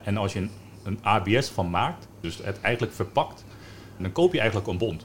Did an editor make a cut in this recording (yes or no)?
yes